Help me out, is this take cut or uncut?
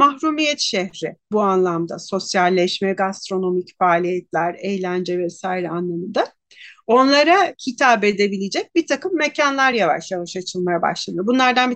uncut